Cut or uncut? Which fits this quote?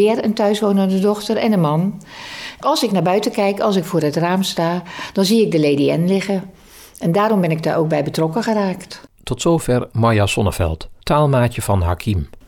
cut